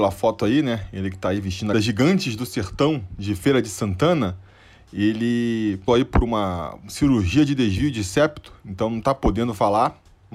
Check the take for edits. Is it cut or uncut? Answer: cut